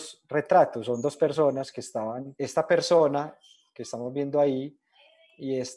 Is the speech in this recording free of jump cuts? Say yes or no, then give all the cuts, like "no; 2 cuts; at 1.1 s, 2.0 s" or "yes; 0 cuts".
yes; 0 cuts